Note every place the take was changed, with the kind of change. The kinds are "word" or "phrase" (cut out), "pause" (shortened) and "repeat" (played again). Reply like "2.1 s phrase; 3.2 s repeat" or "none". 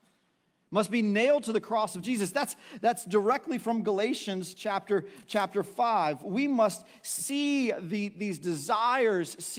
none